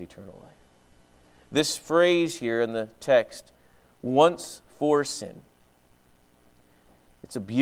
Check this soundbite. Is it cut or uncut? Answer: uncut